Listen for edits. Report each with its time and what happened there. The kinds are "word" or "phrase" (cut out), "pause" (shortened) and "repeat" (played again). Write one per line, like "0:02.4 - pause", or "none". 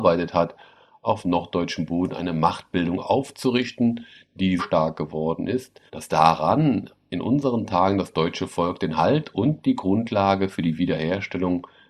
0:04.6 - word
0:05.9 - pause